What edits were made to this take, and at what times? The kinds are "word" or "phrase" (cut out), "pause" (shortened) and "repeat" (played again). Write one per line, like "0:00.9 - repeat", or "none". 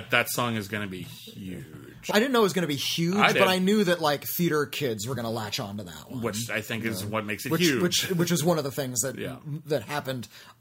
0:02.1 - word